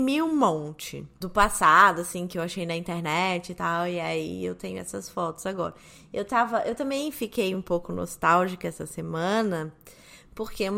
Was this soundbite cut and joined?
no; 0 cuts

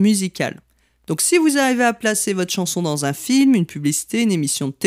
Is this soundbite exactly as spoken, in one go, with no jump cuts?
yes; 0 cuts

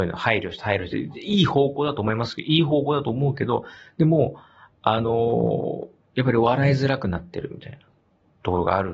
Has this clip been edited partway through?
no; 0 cuts

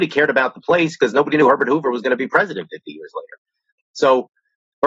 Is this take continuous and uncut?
yes; 0 cuts

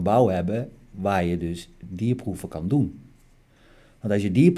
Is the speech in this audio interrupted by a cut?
no; 0 cuts

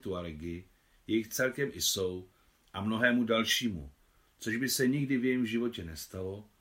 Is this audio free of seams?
yes; 0 cuts

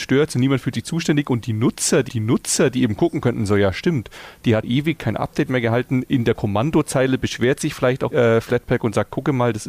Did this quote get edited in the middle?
yes; 3 cuts; at 2.1 s, 4.6 s, 8.1 s

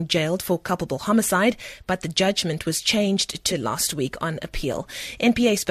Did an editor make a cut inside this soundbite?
yes; 1 cut; at 3.5 s

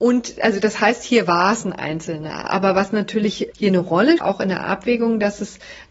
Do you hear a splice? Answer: yes; 2 cuts; at 3.5 s, 4.2 s

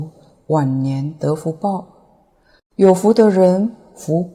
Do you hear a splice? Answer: no; 0 cuts

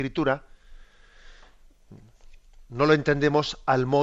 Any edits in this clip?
no; 0 cuts

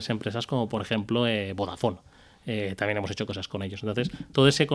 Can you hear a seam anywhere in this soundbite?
no; 0 cuts

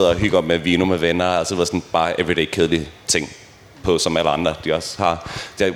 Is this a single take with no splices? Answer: yes; 0 cuts

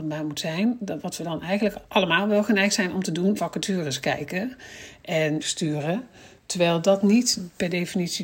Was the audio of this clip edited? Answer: yes; 3 cuts; at 1.9 s, 3.4 s, 5.4 s

